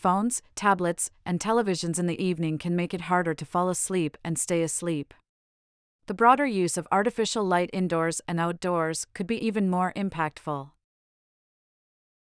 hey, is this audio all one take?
yes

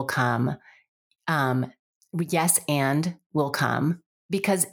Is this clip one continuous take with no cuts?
yes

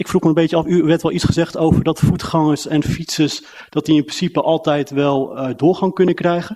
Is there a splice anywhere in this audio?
no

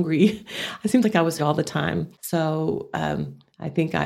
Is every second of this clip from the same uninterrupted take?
no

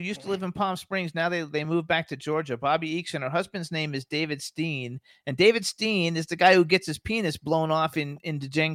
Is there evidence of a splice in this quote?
no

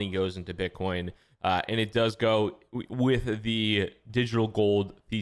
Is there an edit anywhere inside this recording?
no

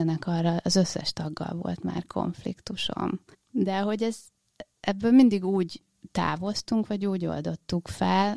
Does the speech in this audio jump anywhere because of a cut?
yes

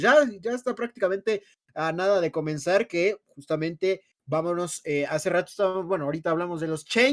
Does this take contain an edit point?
no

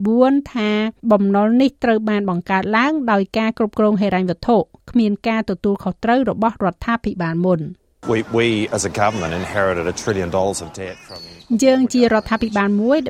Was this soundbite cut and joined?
yes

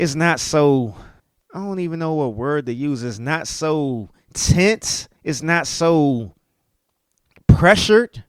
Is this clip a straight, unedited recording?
no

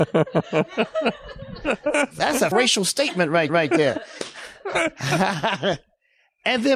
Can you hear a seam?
yes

